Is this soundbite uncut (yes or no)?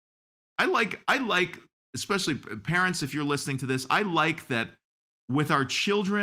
yes